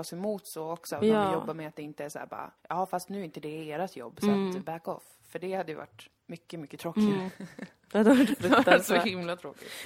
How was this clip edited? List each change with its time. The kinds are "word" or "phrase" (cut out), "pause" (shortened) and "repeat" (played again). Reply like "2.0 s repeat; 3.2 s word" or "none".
2.6 s pause; 6.2 s pause